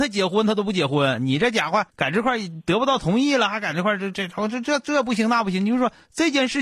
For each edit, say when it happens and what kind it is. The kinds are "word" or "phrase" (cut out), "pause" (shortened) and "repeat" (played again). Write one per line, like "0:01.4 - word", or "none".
0:01.9 - pause